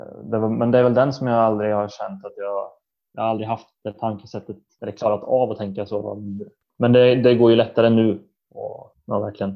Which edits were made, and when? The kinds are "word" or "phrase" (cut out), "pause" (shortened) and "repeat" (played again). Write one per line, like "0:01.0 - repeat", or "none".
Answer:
0:06.0 - phrase